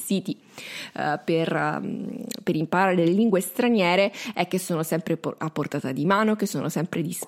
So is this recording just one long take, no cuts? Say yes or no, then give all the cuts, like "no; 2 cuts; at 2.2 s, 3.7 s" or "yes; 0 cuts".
yes; 0 cuts